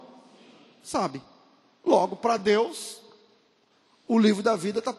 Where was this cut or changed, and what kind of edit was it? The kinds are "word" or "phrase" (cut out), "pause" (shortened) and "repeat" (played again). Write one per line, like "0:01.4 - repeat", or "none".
none